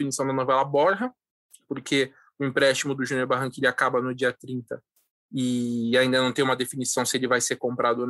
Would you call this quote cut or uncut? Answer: uncut